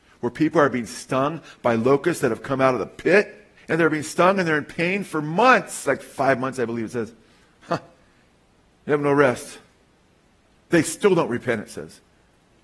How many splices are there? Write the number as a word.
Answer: one